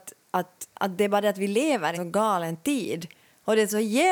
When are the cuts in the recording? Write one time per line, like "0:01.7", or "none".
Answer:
0:01.9